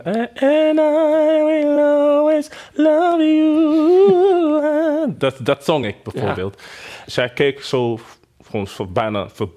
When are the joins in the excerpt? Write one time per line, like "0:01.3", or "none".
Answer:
none